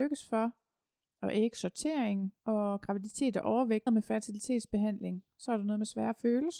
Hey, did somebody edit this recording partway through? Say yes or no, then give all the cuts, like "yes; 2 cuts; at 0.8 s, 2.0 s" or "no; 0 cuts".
yes; 2 cuts; at 2.4 s, 3.9 s